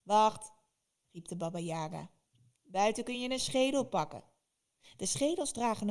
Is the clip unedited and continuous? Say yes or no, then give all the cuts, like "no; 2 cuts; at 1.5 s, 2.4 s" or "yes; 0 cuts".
no; 1 cut; at 2.3 s